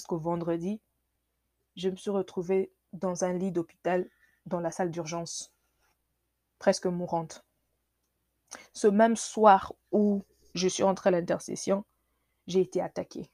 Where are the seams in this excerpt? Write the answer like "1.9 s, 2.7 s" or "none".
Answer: none